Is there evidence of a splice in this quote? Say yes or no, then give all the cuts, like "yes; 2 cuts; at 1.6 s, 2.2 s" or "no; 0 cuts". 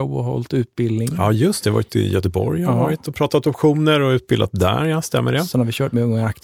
no; 0 cuts